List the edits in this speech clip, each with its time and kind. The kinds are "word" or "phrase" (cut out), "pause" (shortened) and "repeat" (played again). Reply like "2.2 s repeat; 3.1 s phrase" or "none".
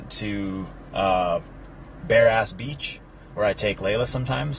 none